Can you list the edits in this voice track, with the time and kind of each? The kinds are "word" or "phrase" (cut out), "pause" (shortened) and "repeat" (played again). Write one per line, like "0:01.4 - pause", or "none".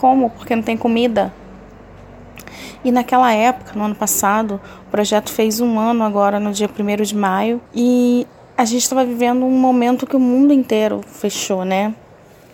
0:07.7 - pause